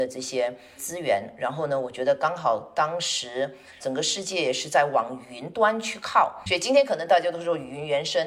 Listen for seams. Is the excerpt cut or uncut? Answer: cut